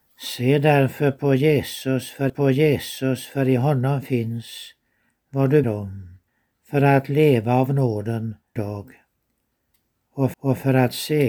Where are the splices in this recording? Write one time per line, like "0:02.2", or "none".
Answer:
0:02.3
0:05.6
0:06.3
0:08.6
0:10.3